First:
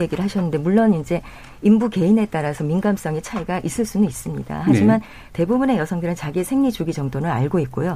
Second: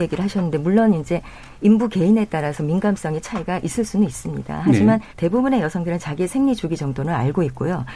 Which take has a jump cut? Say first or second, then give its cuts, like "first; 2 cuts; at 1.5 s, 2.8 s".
second; 1 cut; at 5.1 s